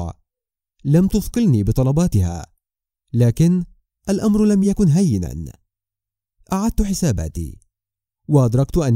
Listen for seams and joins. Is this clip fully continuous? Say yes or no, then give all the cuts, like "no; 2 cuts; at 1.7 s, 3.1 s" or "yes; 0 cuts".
yes; 0 cuts